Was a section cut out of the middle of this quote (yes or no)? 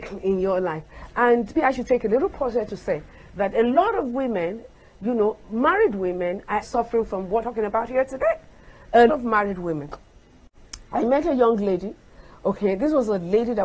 yes